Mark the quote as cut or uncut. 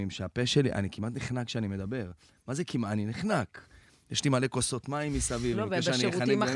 uncut